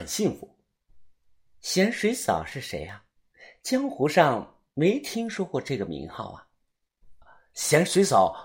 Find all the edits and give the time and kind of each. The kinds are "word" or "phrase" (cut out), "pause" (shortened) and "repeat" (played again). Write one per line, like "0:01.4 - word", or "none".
0:07.2 - pause